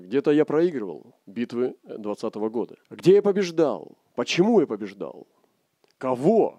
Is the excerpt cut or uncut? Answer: cut